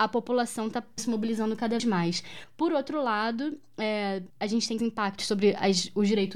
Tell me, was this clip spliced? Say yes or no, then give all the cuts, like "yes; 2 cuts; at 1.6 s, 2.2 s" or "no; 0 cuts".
yes; 4 cuts; at 1.0 s, 1.8 s, 4.3 s, 4.8 s